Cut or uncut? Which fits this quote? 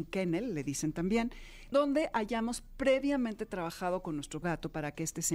cut